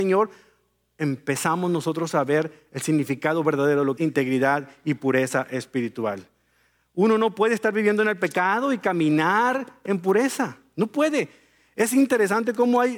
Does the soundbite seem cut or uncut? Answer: cut